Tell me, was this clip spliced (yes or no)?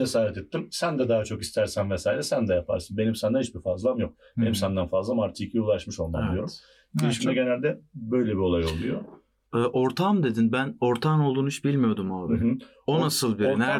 no